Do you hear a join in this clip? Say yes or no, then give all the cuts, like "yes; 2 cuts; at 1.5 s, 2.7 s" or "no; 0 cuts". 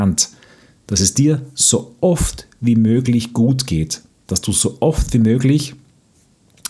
no; 0 cuts